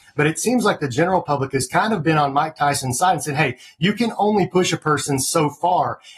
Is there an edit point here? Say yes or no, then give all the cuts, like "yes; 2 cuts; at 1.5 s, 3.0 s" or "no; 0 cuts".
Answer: no; 0 cuts